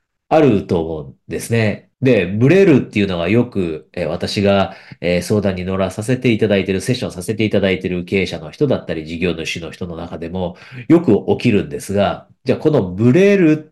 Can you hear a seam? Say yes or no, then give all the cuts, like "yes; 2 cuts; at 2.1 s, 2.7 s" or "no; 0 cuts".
yes; 1 cut; at 1.9 s